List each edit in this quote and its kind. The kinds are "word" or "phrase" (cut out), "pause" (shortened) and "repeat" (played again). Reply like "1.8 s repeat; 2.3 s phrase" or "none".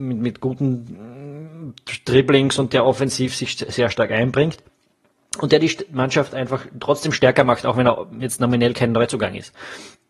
none